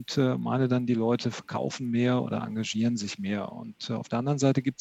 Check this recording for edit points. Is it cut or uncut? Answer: uncut